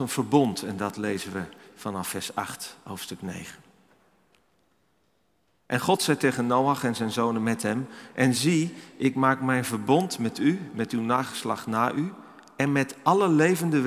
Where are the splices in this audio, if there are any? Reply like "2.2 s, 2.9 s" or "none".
none